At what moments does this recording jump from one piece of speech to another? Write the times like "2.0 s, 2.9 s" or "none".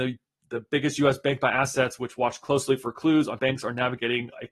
3.4 s